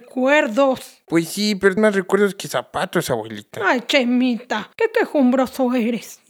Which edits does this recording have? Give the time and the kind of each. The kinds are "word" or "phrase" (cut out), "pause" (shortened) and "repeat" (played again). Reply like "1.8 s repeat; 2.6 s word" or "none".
1.8 s word; 4.7 s pause